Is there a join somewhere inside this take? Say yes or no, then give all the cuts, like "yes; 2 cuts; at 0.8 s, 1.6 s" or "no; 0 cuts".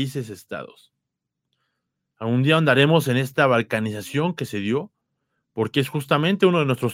no; 0 cuts